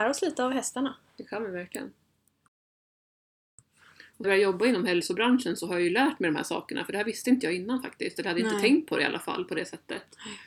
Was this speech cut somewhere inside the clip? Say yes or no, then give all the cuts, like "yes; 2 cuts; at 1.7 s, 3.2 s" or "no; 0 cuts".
yes; 1 cut; at 4.2 s